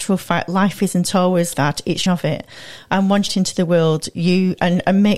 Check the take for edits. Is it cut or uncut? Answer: cut